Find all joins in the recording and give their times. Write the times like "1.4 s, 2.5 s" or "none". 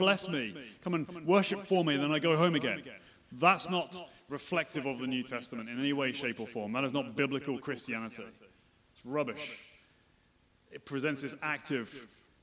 none